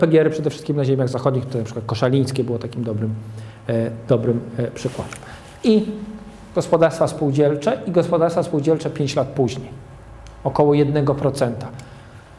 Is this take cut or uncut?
cut